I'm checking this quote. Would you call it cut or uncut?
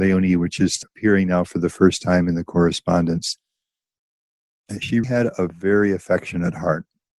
cut